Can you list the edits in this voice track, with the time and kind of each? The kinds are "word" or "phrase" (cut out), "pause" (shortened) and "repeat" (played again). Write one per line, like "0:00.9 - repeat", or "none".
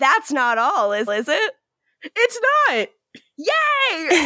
0:01.1 - repeat